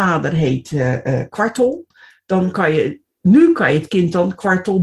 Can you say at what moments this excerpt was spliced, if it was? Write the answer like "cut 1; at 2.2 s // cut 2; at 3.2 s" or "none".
none

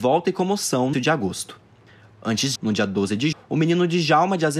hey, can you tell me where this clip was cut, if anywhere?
cut 1; at 0.9 s // cut 2; at 2.5 s // cut 3; at 3.3 s

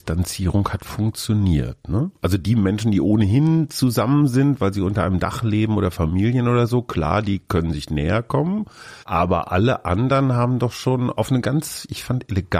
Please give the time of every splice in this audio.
cut 1; at 9.0 s

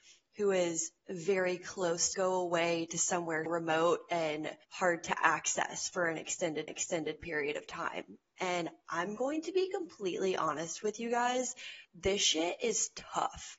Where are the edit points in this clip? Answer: cut 1; at 1.0 s // cut 2; at 2.1 s // cut 3; at 3.5 s // cut 4; at 4.6 s // cut 5; at 6.7 s // cut 6; at 11.8 s

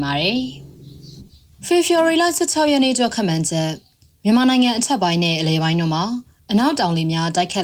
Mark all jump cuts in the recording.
none

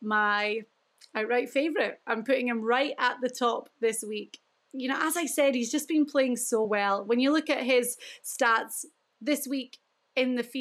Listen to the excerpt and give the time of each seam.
none

